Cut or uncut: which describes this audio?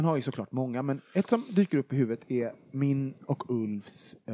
uncut